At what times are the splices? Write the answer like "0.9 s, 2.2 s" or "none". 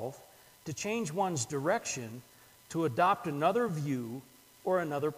none